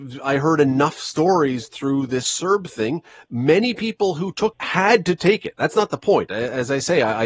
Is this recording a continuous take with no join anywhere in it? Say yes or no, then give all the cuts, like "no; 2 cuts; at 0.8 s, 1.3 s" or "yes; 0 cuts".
no; 1 cut; at 4.5 s